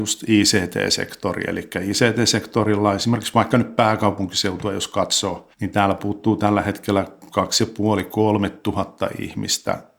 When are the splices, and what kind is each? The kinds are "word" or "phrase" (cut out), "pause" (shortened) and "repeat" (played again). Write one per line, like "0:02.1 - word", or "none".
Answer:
0:05.5 - pause